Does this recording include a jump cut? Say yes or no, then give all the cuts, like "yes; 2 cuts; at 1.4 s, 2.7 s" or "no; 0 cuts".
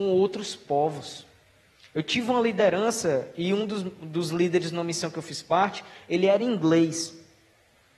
no; 0 cuts